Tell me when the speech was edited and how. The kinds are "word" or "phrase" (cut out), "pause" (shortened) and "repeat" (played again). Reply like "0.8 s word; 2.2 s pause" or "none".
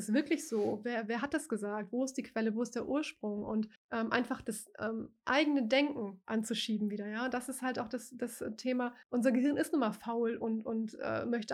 3.8 s pause; 9.0 s pause